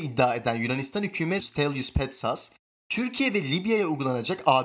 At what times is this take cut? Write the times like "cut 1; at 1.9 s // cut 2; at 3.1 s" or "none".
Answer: cut 1; at 1.4 s